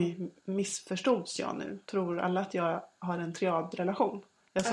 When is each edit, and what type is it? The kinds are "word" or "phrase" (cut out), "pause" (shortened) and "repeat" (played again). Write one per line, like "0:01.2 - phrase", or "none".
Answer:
0:01.8 - pause